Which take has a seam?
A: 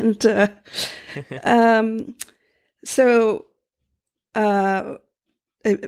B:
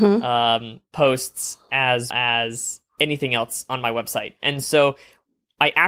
B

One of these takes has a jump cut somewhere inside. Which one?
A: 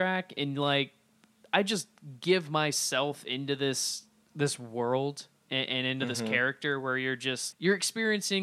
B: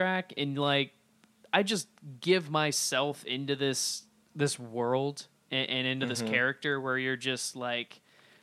A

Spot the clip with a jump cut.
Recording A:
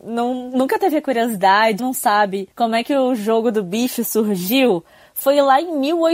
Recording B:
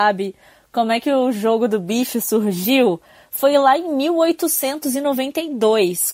A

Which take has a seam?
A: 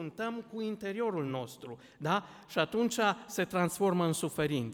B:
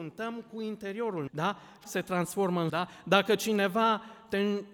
B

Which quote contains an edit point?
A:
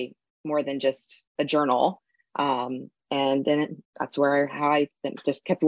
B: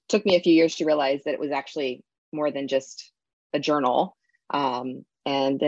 A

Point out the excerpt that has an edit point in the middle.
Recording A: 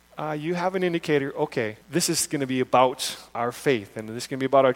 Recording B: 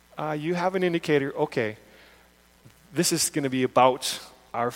A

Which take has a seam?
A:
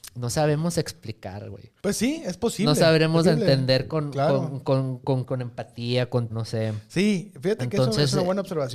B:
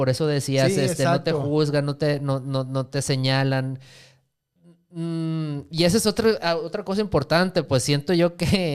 A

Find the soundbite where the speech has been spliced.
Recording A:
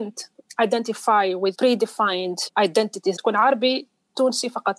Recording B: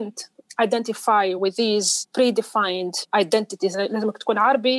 A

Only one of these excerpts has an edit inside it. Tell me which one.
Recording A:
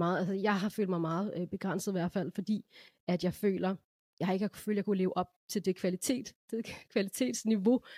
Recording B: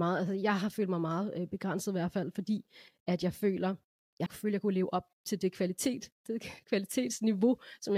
B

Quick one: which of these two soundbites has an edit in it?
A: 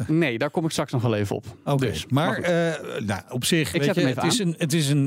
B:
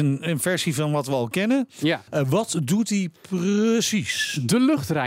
B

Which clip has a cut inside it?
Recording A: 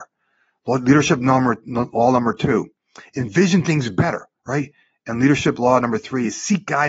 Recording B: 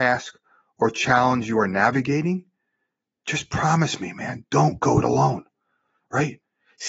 A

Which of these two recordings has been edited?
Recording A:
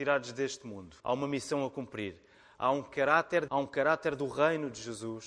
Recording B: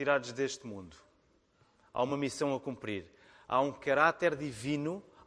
A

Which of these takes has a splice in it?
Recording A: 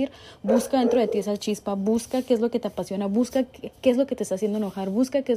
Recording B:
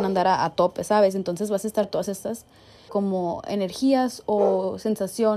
B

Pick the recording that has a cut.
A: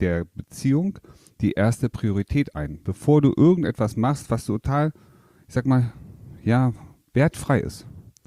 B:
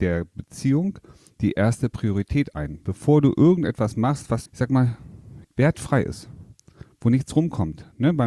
B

